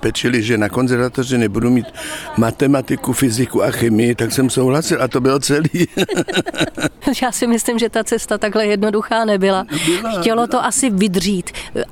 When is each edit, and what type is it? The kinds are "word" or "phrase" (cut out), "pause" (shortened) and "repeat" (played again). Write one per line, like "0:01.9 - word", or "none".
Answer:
none